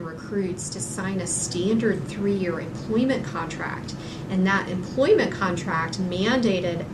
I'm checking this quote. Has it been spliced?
no; 0 cuts

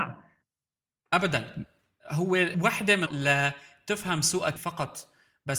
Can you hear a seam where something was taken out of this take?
yes; 3 cuts; at 2.5 s, 3.1 s, 4.6 s

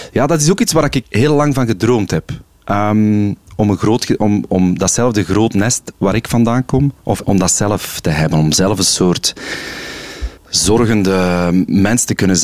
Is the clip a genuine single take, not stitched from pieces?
no; 3 cuts; at 1.0 s, 7.2 s, 10.4 s

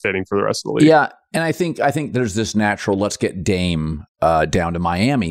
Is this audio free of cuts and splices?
yes; 0 cuts

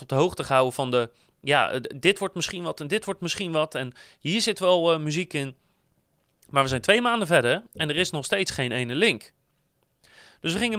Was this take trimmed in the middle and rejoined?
no; 0 cuts

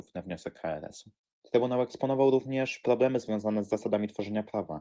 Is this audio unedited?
no; 1 cut; at 1.3 s

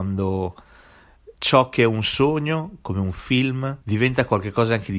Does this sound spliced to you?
yes; 2 cuts; at 1.3 s, 3.8 s

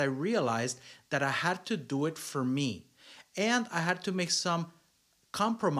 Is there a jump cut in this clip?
no; 0 cuts

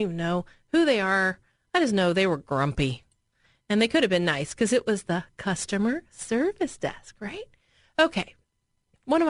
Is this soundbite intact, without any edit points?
yes; 0 cuts

